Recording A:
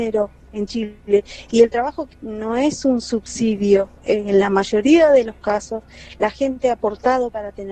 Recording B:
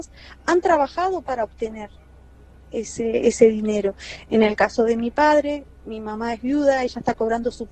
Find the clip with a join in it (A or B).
A